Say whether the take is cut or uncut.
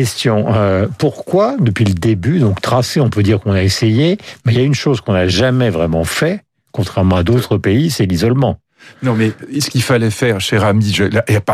uncut